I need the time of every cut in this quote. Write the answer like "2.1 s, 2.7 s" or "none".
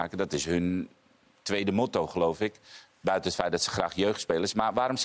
none